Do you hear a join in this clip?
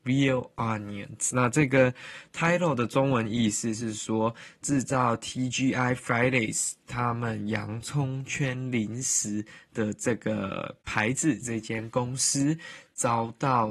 no; 0 cuts

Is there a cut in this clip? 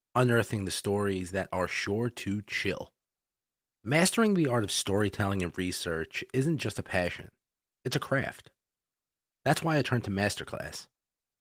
no; 0 cuts

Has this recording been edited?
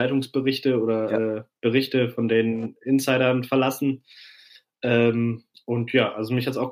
no; 0 cuts

